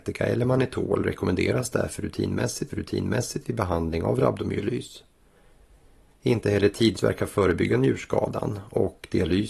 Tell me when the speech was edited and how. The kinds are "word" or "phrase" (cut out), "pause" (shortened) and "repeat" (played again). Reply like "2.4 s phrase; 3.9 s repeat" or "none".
2.7 s repeat; 7.0 s word

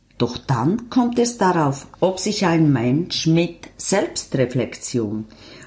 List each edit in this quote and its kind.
1.9 s word

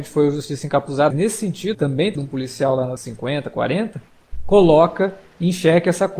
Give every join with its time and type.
1.1 s word; 1.7 s word; 2.2 s word; 3.0 s word

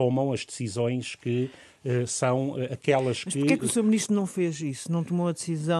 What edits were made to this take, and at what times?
none

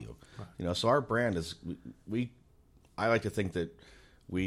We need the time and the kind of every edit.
none

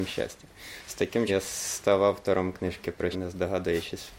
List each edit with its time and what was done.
1.3 s word; 3.1 s word

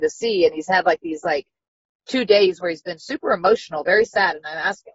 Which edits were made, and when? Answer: none

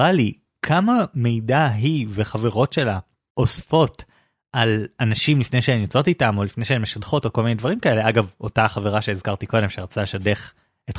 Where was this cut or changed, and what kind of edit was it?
none

